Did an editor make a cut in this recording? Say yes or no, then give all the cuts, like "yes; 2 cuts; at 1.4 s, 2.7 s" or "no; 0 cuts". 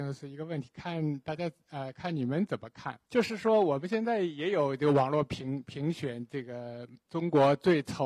yes; 1 cut; at 3.0 s